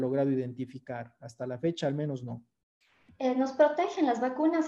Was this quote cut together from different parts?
yes; 1 cut; at 2.8 s

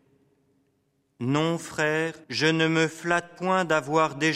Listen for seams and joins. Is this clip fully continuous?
no; 1 cut; at 2.2 s

